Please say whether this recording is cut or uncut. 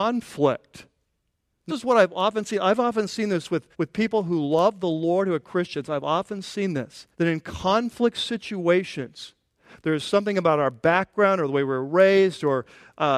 cut